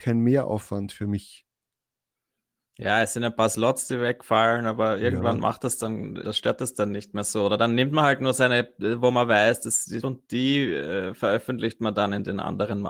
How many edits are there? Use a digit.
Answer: 2